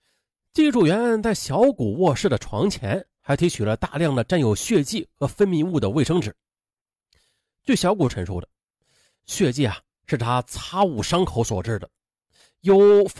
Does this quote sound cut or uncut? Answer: uncut